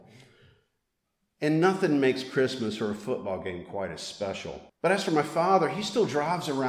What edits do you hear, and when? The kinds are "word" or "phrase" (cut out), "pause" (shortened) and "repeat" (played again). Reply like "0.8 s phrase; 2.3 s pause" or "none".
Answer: 4.7 s pause